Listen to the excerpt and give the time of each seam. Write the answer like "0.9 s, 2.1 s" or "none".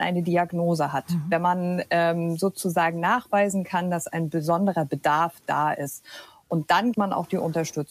6.9 s